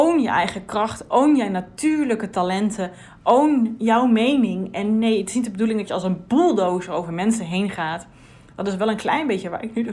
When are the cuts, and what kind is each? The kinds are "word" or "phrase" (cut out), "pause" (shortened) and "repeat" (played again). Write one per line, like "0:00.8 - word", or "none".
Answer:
none